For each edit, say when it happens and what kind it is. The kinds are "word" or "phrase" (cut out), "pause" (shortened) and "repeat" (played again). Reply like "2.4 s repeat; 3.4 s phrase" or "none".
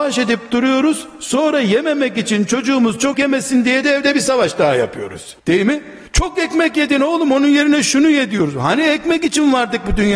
3.1 s word; 5.4 s pause; 6.1 s pause